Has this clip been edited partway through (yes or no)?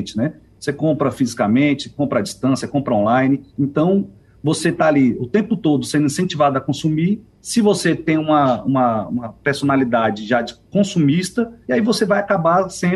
yes